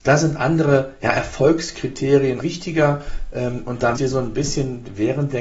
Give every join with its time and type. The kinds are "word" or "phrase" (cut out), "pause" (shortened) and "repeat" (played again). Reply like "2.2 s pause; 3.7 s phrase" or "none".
2.4 s word; 4.0 s word